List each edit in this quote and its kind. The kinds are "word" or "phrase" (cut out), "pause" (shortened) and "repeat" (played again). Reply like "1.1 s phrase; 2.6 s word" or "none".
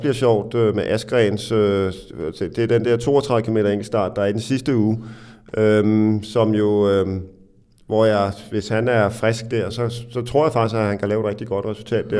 none